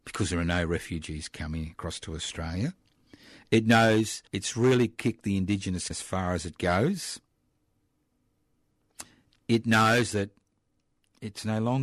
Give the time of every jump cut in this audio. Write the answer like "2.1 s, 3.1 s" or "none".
4.3 s, 5.9 s